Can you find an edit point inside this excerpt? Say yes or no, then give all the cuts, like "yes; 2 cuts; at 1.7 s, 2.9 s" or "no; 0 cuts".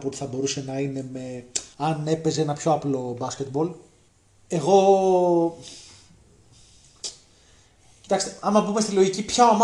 yes; 2 cuts; at 1.7 s, 4.1 s